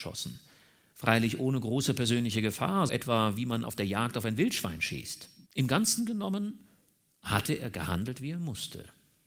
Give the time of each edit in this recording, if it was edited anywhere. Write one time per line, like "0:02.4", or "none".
0:02.9
0:05.5